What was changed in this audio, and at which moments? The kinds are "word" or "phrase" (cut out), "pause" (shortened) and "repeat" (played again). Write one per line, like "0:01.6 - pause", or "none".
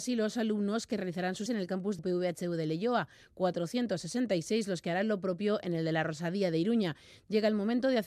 0:01.5 - word
0:02.0 - word